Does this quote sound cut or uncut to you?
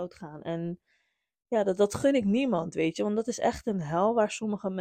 uncut